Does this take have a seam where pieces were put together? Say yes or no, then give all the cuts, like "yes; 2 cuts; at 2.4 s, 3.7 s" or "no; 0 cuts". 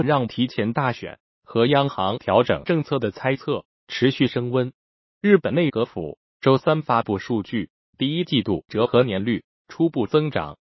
yes; 1 cut; at 8.7 s